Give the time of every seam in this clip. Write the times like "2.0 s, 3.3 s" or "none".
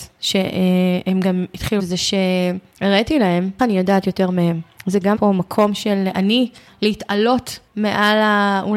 1.8 s, 3.6 s, 5.1 s, 6.7 s